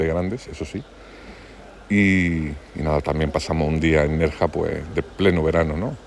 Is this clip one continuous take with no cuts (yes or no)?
yes